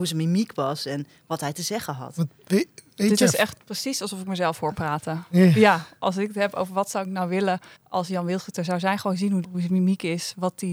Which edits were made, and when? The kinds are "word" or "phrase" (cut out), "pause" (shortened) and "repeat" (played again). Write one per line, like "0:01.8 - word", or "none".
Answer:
0:07.8 - pause
0:09.4 - phrase